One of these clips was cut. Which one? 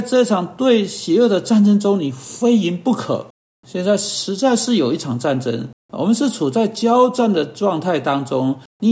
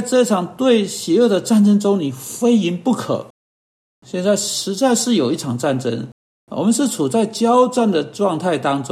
first; 2 cuts; at 3.4 s, 5.8 s

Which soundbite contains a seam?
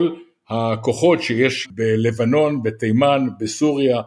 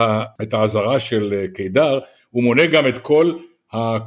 first; 1 cut; at 1.6 s

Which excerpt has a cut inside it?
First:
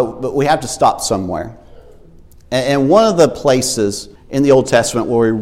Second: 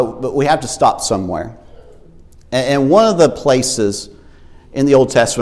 first; 1 cut; at 4.2 s

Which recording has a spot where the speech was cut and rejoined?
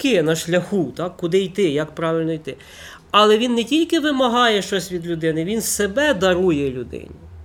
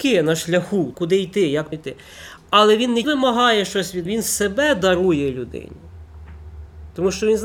second; 4 cuts; at 0.9 s, 1.7 s, 3.0 s, 4.1 s

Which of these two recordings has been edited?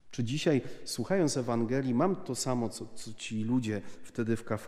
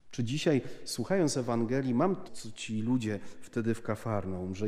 second; 1 cut; at 2.3 s

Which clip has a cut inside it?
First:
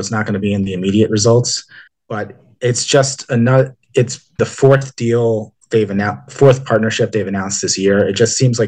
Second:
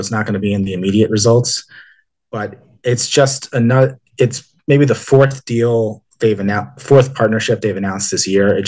first; 2 cuts; at 1.9 s, 4.4 s

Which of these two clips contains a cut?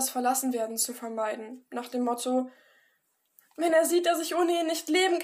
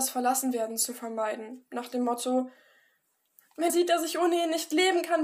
second; 1 cut; at 3.7 s

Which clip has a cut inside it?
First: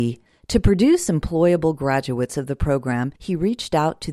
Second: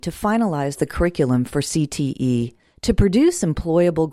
first; 1 cut; at 3.2 s

